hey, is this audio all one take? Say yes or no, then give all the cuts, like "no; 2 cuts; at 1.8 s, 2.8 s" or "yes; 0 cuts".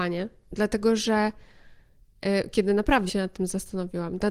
no; 1 cut; at 3.1 s